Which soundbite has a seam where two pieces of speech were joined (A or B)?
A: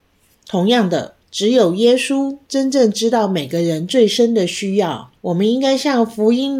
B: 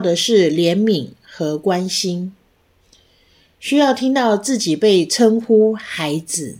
A